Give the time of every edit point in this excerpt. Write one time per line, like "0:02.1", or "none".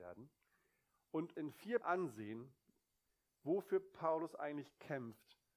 0:01.3
0:01.8